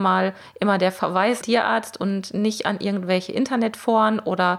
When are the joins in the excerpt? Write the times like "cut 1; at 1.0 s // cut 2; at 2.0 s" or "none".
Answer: cut 1; at 1.4 s